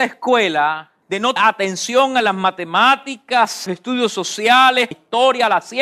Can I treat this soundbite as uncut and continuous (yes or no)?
no